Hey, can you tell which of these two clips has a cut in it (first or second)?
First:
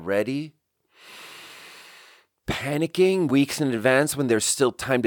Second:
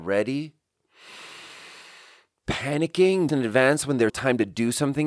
second